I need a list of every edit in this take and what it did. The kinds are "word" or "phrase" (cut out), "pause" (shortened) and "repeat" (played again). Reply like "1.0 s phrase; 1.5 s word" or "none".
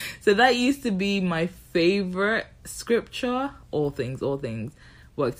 none